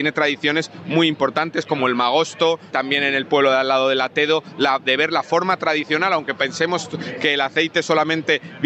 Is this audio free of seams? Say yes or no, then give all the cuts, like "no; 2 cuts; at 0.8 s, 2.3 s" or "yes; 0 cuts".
no; 1 cut; at 2.7 s